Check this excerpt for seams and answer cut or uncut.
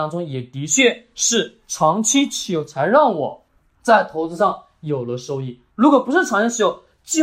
cut